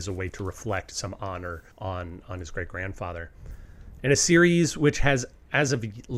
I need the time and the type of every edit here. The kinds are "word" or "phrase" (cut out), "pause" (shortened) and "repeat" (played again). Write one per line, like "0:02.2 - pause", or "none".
0:01.7 - pause